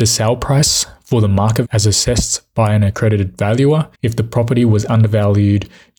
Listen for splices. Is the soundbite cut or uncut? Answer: cut